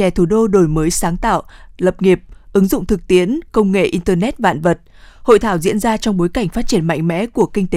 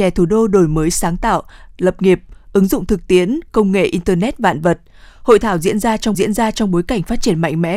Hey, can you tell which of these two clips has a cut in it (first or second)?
second